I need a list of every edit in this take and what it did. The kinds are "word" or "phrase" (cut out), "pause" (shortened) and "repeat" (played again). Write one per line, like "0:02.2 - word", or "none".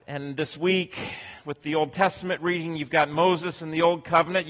none